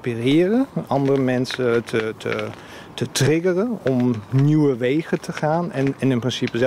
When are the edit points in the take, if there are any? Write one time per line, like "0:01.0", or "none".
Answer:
0:03.8